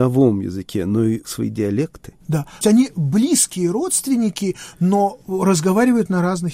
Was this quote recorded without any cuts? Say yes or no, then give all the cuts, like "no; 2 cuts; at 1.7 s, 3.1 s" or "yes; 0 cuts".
no; 1 cut; at 1.2 s